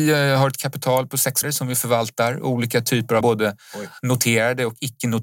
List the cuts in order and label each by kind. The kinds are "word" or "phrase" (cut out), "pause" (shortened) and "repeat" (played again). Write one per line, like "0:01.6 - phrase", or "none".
0:01.4 - word
0:03.2 - word